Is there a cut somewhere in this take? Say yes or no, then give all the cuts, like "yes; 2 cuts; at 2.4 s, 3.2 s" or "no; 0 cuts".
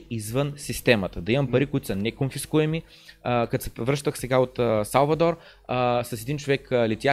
no; 0 cuts